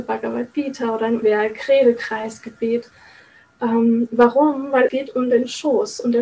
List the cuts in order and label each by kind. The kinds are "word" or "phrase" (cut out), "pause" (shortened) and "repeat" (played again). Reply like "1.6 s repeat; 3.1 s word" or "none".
1.2 s word; 4.9 s word